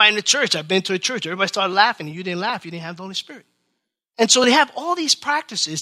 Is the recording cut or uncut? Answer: uncut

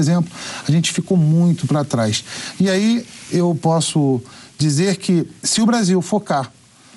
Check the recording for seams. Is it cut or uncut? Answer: cut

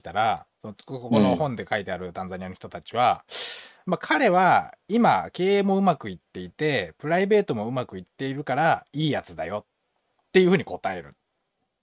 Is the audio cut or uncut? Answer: uncut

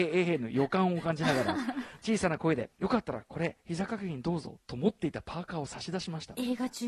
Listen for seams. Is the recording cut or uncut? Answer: cut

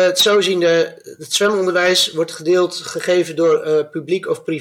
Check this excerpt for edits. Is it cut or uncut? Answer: uncut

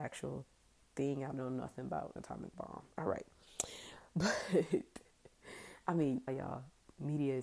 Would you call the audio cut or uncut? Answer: cut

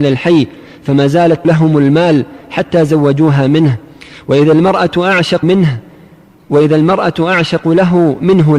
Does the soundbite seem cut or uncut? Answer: cut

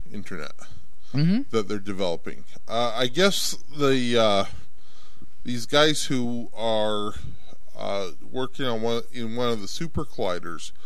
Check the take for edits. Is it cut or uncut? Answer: uncut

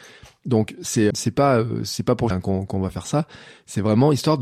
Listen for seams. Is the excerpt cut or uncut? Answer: cut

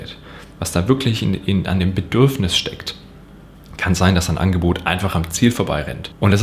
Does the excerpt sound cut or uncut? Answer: uncut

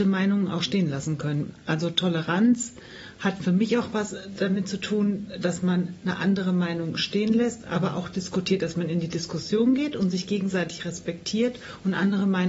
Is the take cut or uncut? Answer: uncut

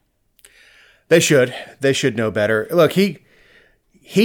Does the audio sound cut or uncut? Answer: uncut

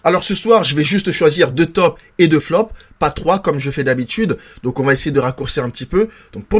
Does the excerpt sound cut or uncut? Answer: uncut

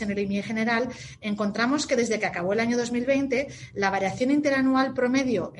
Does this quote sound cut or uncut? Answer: uncut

